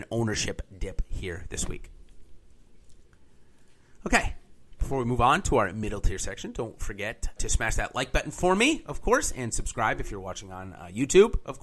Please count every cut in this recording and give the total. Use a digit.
1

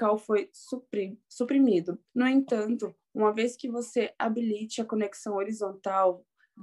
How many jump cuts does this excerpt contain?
1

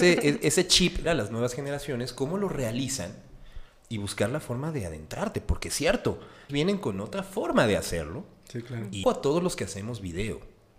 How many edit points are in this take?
3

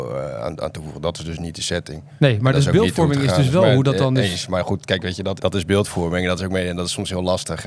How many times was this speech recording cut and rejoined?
1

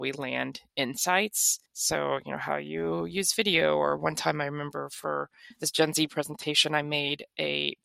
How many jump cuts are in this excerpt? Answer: 1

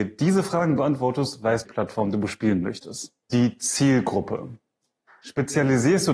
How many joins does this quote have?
2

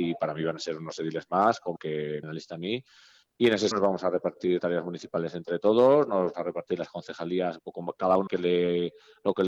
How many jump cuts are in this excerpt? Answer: 7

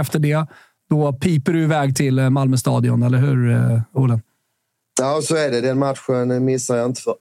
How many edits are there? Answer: 0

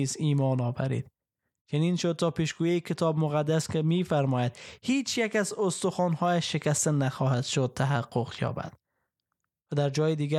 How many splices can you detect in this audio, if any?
0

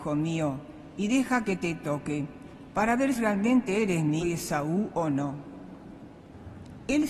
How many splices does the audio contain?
2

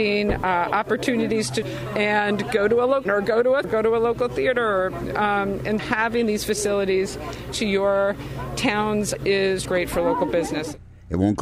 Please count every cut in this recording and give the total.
7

